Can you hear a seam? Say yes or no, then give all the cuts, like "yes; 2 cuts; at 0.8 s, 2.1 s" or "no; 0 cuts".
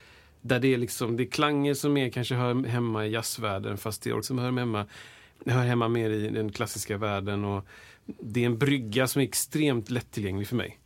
yes; 1 cut; at 4.2 s